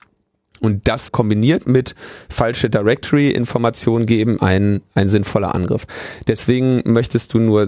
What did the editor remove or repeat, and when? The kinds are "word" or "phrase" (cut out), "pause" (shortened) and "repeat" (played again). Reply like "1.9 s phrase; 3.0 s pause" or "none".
1.1 s word; 4.4 s word